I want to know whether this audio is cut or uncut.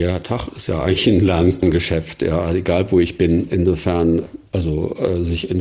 uncut